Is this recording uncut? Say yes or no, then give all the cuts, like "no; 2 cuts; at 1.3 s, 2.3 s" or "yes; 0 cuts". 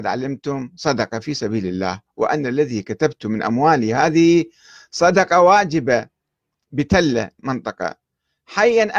yes; 0 cuts